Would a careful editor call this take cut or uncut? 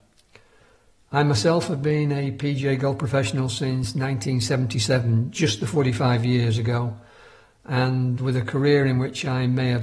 uncut